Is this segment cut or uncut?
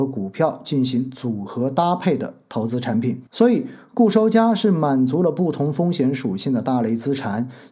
cut